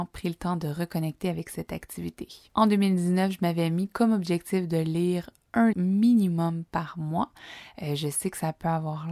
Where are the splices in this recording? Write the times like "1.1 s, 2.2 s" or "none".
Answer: 5.7 s